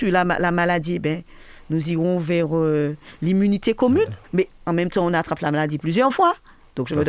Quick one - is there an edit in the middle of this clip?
yes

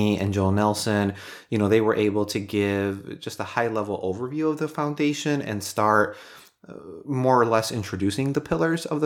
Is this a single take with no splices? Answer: yes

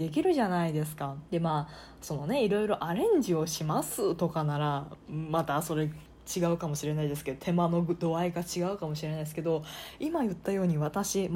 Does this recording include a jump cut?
yes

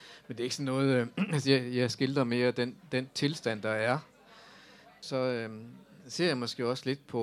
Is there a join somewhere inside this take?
no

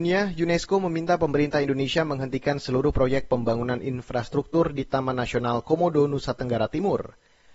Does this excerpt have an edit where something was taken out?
no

